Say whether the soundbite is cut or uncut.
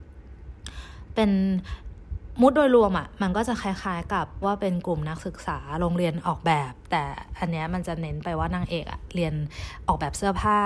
cut